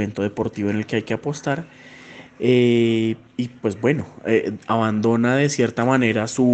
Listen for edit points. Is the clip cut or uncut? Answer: uncut